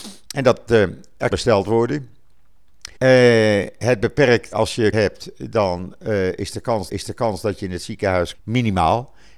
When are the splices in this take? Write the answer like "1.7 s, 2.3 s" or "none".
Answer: 1.3 s, 3.0 s, 4.5 s, 4.9 s, 6.9 s, 8.3 s